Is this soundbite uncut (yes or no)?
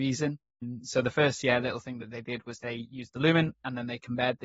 yes